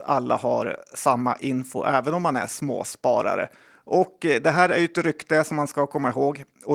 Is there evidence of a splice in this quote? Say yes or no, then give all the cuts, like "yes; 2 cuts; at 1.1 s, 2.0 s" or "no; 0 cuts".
no; 0 cuts